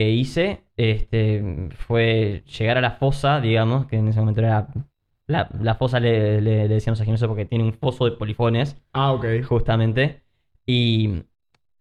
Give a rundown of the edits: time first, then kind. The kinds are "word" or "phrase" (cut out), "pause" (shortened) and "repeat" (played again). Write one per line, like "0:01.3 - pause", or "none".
none